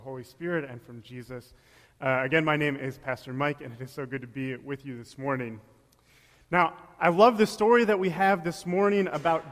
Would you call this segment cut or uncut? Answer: uncut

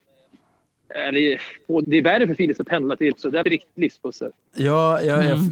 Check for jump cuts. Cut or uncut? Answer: cut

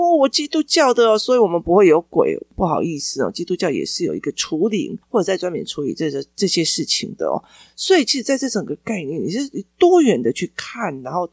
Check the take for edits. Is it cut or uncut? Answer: uncut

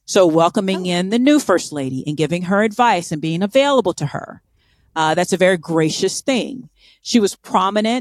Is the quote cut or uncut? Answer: uncut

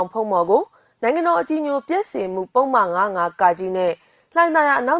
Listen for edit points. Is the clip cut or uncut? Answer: uncut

